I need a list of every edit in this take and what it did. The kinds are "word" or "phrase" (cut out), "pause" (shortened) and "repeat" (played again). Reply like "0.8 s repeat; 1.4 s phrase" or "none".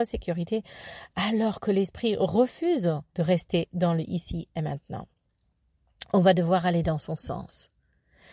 3.1 s pause

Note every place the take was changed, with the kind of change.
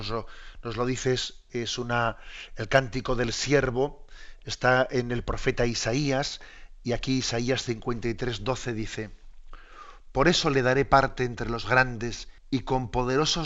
12.4 s pause

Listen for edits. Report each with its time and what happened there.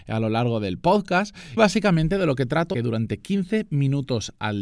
1.6 s word; 2.7 s phrase

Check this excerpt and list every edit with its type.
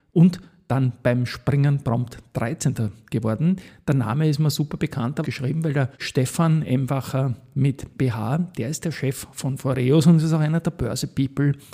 5.2 s word; 5.9 s pause; 8.0 s phrase

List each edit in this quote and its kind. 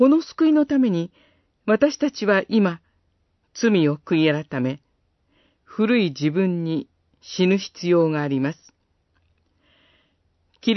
none

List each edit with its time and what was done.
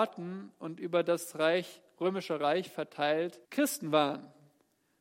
3.4 s pause

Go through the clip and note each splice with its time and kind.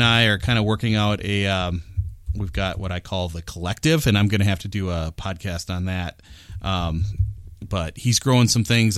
none

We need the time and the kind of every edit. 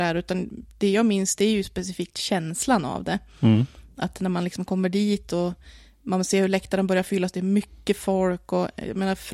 none

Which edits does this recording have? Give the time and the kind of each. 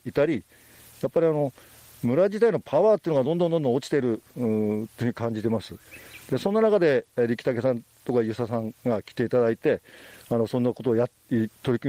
none

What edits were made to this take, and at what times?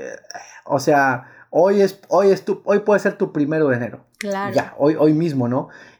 4.1 s pause

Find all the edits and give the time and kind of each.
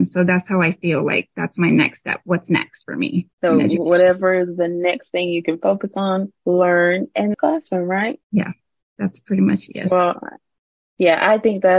3.3 s pause; 7.3 s phrase; 8.2 s pause

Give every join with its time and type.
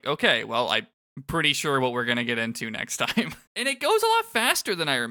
3.5 s pause

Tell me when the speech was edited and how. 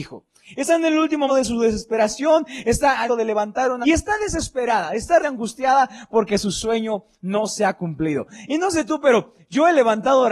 1.3 s word; 3.1 s phrase; 3.8 s word; 5.2 s word

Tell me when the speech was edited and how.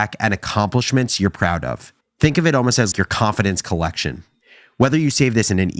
2.0 s pause; 2.9 s word

